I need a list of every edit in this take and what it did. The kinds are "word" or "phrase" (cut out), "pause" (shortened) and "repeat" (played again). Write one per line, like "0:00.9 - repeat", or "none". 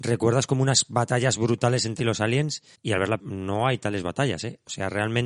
0:02.0 - phrase
0:02.7 - pause
0:03.2 - word